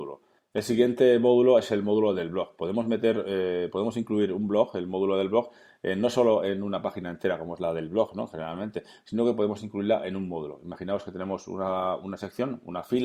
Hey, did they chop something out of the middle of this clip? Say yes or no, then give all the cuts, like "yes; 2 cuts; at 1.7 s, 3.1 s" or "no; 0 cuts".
no; 0 cuts